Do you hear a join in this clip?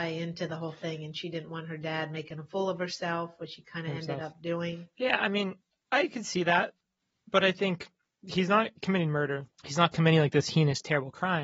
yes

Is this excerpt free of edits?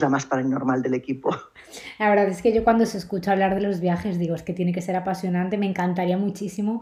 yes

